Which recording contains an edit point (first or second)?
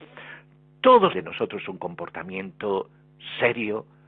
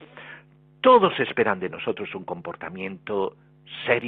first